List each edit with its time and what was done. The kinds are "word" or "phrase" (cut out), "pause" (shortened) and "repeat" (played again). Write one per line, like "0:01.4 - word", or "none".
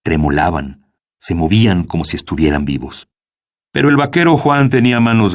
none